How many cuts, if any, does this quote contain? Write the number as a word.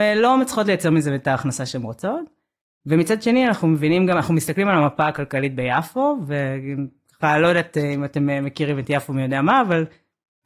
zero